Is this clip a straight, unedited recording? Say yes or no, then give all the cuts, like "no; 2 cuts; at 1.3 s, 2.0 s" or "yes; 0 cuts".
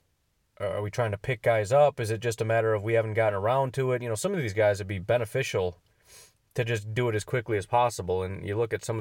yes; 0 cuts